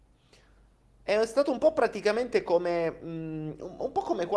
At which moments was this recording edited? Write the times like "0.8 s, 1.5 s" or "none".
none